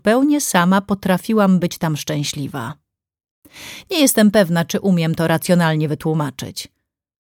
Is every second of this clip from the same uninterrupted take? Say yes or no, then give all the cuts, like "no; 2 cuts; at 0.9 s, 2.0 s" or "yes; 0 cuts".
yes; 0 cuts